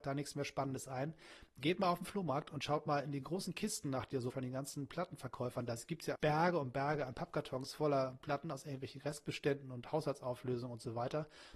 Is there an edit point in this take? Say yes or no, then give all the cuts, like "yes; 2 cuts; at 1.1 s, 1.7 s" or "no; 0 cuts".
yes; 2 cuts; at 4.3 s, 6.1 s